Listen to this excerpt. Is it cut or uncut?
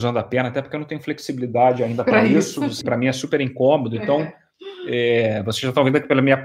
cut